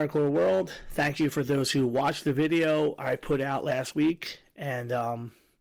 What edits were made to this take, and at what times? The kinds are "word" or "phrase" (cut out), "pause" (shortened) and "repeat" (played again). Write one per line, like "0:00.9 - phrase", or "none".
none